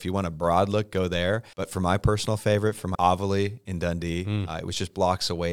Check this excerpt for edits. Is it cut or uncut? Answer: cut